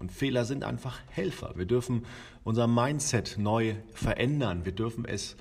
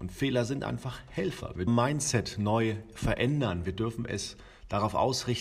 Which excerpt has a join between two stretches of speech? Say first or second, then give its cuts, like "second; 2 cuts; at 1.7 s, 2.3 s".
second; 1 cut; at 1.7 s